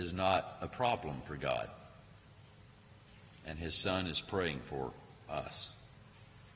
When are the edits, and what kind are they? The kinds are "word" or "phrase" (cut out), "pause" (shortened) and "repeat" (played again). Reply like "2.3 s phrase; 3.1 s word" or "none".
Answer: none